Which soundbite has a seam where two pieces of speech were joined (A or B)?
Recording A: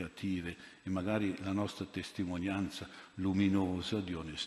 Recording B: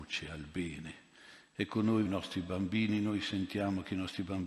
B